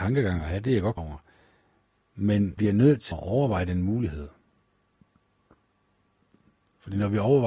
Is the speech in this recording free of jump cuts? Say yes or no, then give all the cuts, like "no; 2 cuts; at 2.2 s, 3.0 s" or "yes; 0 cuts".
no; 3 cuts; at 1.0 s, 2.6 s, 3.1 s